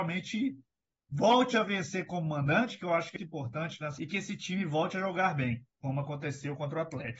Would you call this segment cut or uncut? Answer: cut